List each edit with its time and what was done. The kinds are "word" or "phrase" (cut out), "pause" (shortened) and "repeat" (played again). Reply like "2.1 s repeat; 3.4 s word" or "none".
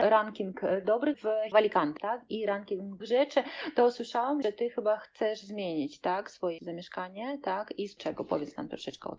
1.1 s word; 1.5 s word; 2.0 s word; 3.0 s word; 4.4 s word; 6.6 s word; 8.0 s word